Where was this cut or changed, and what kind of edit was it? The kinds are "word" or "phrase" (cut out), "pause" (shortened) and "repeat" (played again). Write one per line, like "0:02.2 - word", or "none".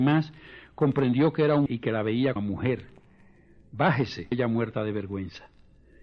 0:01.7 - word
0:02.4 - word
0:04.3 - word